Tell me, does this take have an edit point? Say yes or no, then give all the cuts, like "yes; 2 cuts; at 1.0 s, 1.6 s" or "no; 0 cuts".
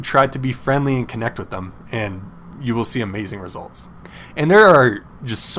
no; 0 cuts